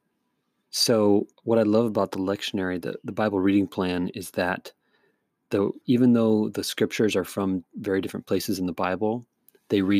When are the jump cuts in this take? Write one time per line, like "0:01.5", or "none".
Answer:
0:01.3
0:05.8